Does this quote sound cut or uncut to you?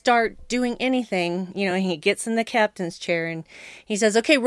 uncut